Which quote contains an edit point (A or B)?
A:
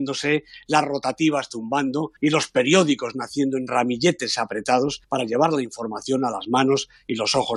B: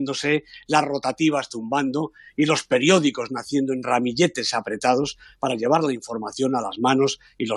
A